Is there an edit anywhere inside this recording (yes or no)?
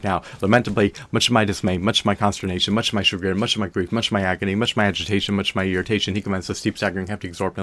no